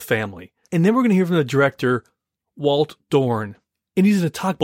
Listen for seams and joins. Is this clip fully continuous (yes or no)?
yes